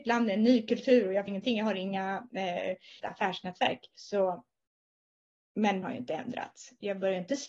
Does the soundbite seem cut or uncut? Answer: cut